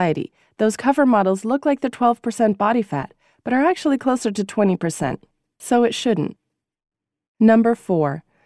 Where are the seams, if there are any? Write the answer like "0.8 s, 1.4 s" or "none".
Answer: none